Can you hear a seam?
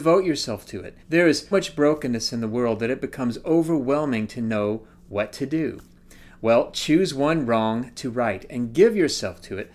yes; 2 cuts; at 1.0 s, 1.5 s

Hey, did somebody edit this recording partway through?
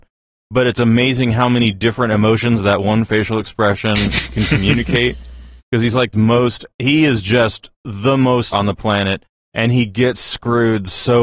yes; 5 cuts; at 5.6 s, 6.1 s, 6.7 s, 7.7 s, 8.5 s

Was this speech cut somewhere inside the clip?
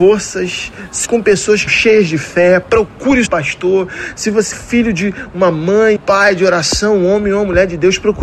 yes; 5 cuts; at 1.0 s, 1.7 s, 3.3 s, 4.5 s, 6.0 s

